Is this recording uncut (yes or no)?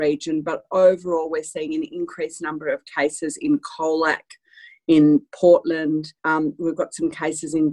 no